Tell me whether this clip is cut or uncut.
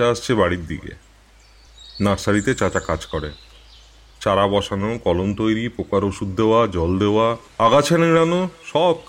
uncut